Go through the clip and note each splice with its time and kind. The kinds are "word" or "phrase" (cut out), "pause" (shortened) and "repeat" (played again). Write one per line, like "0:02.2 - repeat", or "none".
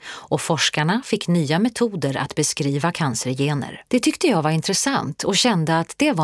0:03.9 - pause